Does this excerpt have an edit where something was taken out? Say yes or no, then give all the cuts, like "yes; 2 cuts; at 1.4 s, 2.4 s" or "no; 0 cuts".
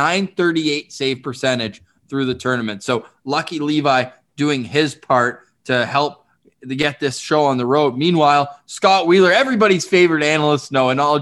no; 0 cuts